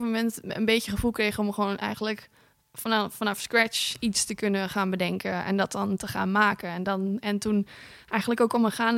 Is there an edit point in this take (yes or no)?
no